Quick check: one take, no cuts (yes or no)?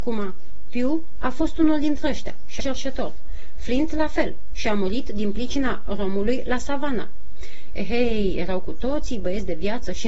no